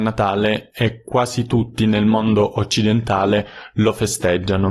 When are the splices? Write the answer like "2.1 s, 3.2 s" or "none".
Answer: none